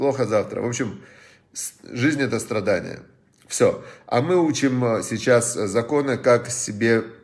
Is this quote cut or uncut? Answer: uncut